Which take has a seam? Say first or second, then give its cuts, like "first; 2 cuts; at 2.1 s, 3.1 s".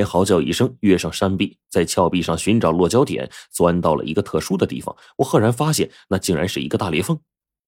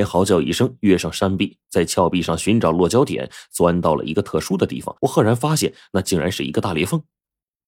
second; 1 cut; at 5.0 s